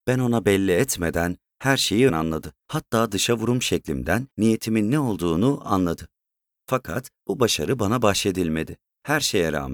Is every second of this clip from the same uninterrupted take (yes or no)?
no